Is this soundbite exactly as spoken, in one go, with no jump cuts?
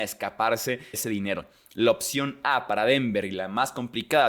no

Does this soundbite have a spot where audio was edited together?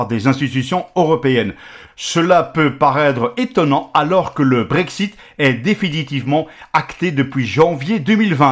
no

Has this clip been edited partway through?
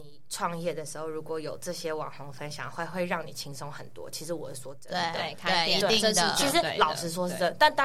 no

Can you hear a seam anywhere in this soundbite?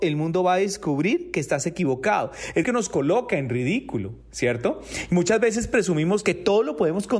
yes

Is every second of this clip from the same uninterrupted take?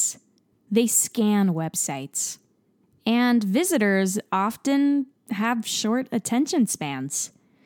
yes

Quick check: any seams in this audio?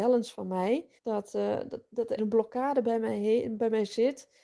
yes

